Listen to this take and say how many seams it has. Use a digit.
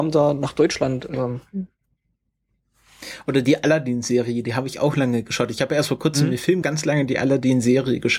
1